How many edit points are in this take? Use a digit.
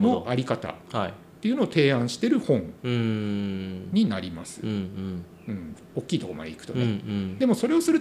1